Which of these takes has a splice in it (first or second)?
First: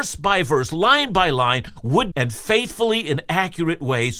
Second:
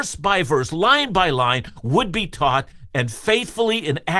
first